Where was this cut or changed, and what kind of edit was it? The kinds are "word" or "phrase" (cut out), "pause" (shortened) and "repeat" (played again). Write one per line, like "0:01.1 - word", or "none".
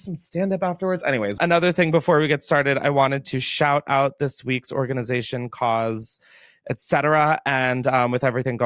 none